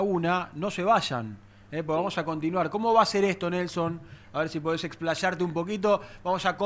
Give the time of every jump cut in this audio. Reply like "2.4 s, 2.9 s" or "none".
none

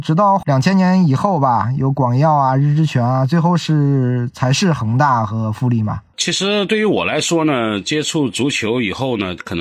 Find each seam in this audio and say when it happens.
6.1 s

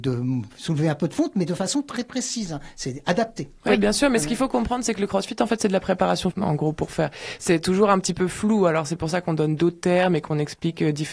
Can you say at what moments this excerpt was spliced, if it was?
6.3 s

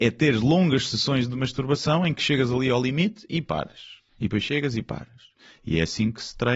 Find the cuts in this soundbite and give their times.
4.1 s

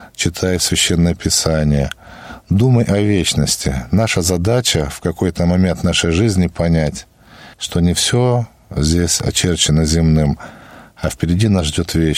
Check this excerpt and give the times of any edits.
7.5 s

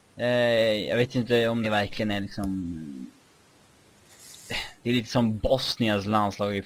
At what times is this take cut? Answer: 1.6 s

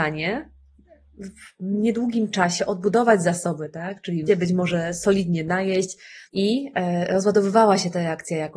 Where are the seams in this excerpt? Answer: 4.3 s, 6.3 s

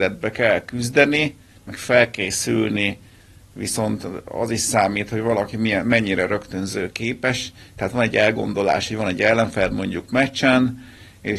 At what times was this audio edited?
none

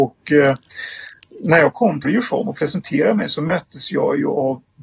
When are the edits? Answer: 2.0 s

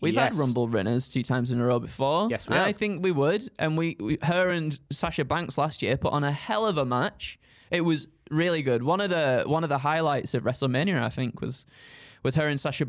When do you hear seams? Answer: none

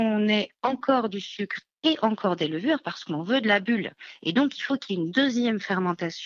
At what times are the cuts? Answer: none

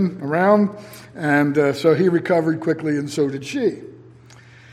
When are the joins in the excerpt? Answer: none

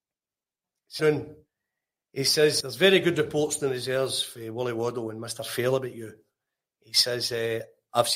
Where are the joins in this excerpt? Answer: 1.0 s, 2.6 s

